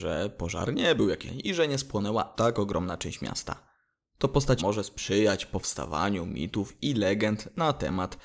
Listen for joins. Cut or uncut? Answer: cut